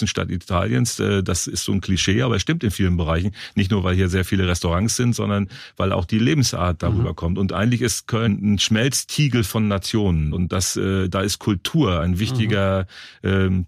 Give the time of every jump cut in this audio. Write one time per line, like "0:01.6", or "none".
0:08.3
0:10.3